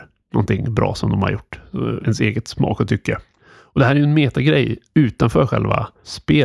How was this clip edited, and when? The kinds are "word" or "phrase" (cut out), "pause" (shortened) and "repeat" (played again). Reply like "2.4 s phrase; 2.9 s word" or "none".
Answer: 2.0 s word